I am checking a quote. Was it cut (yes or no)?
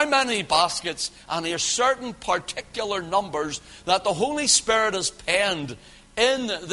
no